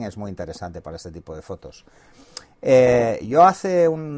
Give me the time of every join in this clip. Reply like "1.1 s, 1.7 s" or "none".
none